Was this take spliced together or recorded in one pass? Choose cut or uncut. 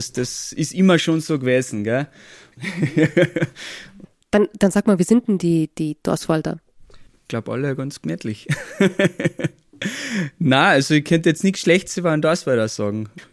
cut